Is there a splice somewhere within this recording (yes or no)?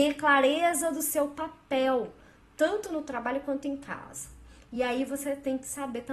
no